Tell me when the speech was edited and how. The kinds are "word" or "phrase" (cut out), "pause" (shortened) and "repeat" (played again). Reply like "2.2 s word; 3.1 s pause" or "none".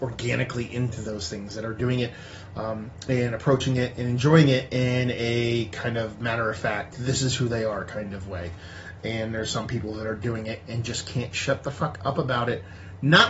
none